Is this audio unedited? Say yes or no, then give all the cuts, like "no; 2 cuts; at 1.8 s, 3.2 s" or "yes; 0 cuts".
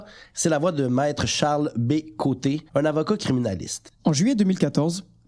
no; 2 cuts; at 2.7 s, 4.0 s